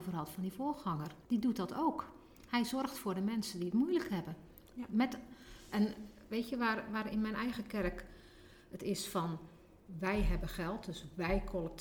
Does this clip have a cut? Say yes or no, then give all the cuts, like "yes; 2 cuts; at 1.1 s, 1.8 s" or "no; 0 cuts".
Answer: yes; 1 cut; at 1.3 s